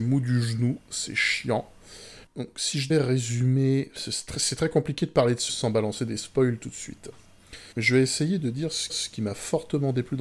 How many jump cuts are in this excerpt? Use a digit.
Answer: 5